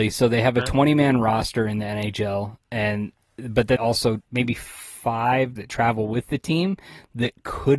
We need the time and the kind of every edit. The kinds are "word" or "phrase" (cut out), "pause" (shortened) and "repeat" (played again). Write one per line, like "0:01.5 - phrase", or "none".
0:02.6 - pause
0:03.8 - word
0:04.3 - phrase
0:05.6 - phrase